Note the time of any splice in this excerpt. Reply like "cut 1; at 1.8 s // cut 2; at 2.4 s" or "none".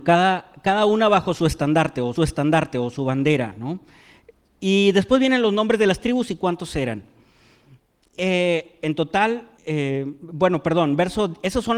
cut 1; at 2.2 s // cut 2; at 9.6 s